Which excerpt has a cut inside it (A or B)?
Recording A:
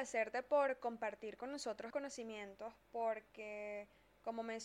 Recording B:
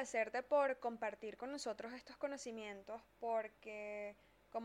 A